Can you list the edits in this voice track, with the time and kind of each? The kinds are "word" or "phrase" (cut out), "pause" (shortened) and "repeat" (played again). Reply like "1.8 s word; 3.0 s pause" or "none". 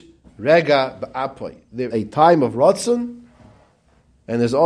1.9 s word

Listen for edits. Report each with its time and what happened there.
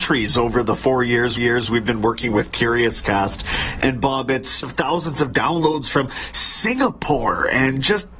1.4 s repeat; 4.6 s phrase

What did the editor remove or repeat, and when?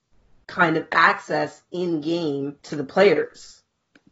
2.6 s pause

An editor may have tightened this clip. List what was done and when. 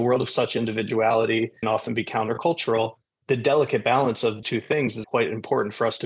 1.6 s phrase; 4.4 s word; 5.0 s word

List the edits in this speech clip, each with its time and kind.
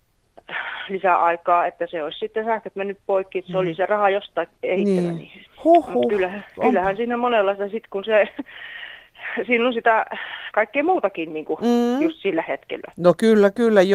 4.6 s pause; 5.5 s pause; 6.5 s pause

